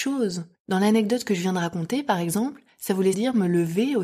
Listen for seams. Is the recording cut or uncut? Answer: cut